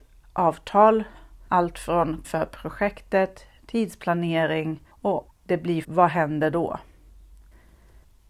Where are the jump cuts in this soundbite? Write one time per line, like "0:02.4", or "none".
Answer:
0:02.2
0:05.3
0:05.8